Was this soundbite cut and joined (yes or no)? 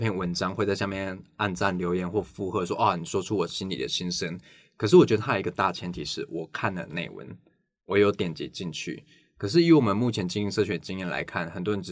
no